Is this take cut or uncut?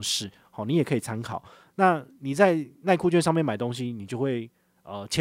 uncut